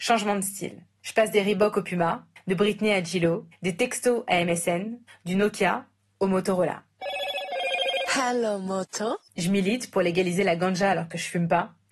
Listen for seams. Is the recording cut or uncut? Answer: uncut